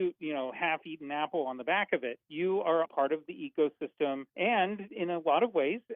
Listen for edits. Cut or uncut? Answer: cut